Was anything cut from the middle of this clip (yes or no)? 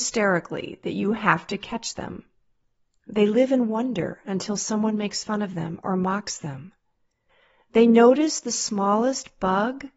no